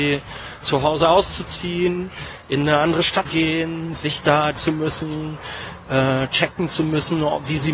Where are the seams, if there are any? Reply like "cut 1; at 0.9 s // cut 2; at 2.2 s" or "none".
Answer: cut 1; at 3.3 s // cut 2; at 4.6 s